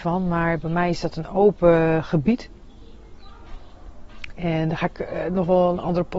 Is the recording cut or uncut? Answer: uncut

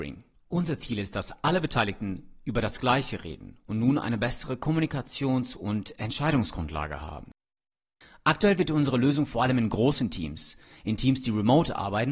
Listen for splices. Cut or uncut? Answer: uncut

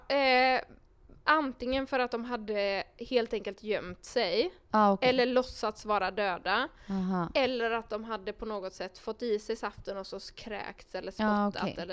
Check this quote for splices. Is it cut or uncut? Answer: uncut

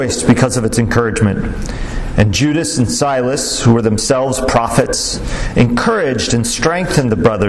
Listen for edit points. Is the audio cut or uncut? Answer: uncut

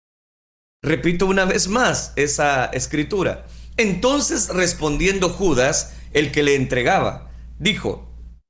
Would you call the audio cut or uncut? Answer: uncut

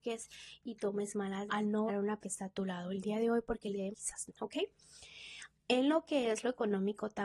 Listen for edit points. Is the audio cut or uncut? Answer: cut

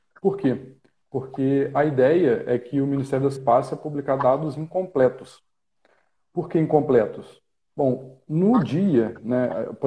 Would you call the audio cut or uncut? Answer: cut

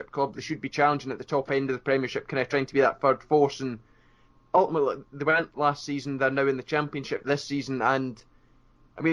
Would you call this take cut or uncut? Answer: uncut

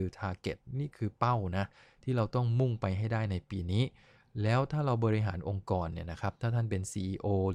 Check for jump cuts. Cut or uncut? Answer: uncut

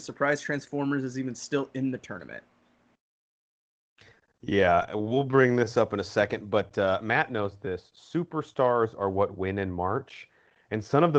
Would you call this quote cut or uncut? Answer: uncut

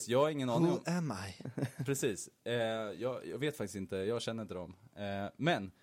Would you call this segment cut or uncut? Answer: uncut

